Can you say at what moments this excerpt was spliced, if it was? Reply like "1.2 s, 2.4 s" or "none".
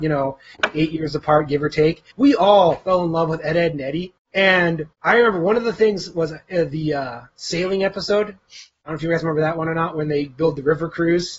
2.1 s, 4.9 s